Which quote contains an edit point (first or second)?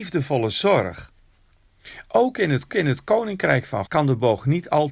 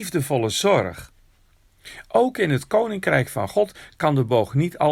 first